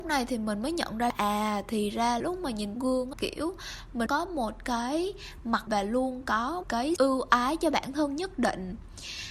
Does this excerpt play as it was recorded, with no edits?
no; 8 cuts; at 1.1 s, 2.2 s, 2.8 s, 3.1 s, 4.1 s, 5.7 s, 6.6 s, 7.0 s

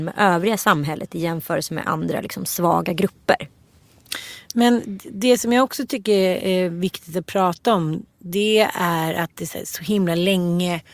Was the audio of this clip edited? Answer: no; 0 cuts

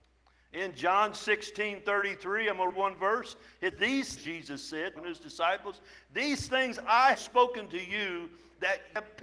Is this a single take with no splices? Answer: no; 5 cuts; at 2.7 s, 3.7 s, 4.2 s, 5.0 s, 7.1 s

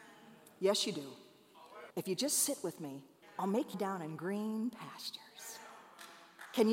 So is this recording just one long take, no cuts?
no; 3 cuts; at 1.9 s, 3.2 s, 3.7 s

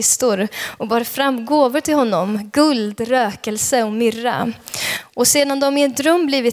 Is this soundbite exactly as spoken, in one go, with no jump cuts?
yes; 0 cuts

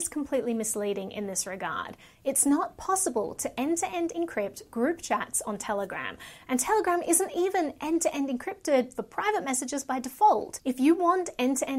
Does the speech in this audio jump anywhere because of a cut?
no; 0 cuts

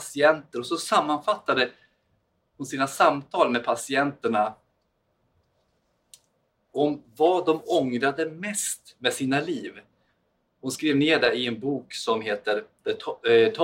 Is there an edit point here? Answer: no; 0 cuts

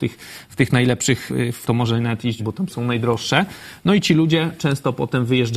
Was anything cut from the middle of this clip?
yes; 4 cuts; at 1.3 s, 1.6 s, 2.4 s, 2.7 s

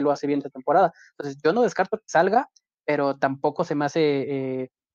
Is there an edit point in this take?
no; 0 cuts

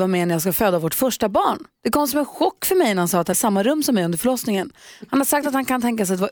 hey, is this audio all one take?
no; 1 cut; at 3.3 s

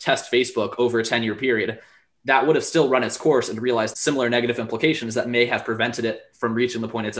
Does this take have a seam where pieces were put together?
yes; 1 cut; at 3.9 s

